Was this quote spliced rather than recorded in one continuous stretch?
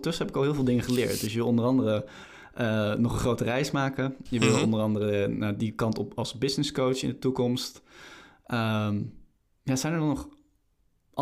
no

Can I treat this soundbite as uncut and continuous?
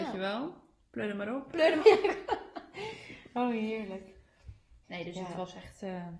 no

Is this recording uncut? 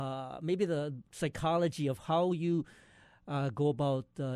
yes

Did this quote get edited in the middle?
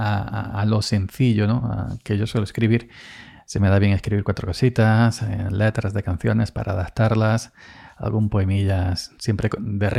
no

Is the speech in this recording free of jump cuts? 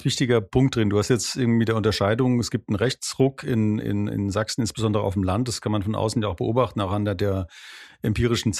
yes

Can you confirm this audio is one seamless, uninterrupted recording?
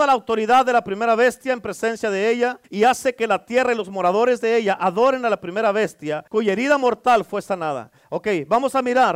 no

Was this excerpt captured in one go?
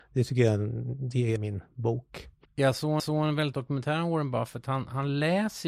no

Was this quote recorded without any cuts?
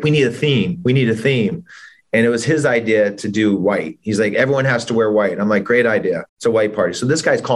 no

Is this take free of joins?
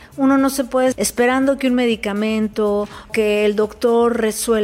no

